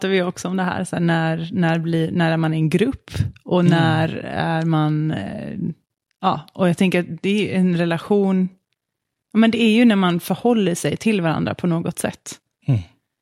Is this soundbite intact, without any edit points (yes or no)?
yes